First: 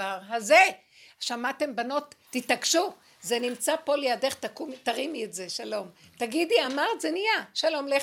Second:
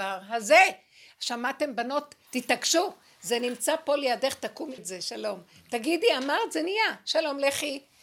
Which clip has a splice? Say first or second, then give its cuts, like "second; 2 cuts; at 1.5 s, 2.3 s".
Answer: second; 1 cut; at 4.8 s